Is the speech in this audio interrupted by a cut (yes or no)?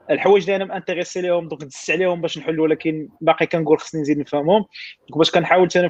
yes